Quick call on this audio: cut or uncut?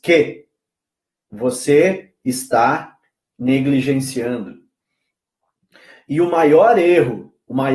uncut